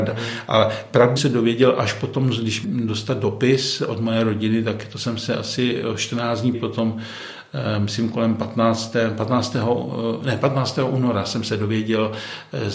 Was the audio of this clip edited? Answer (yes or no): yes